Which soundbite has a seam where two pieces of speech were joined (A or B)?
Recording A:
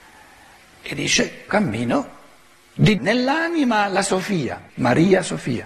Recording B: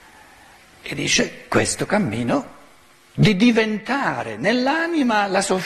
A